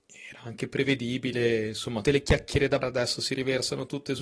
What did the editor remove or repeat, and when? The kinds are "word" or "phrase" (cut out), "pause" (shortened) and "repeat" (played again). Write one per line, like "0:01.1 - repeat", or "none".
0:02.0 - word
0:02.8 - word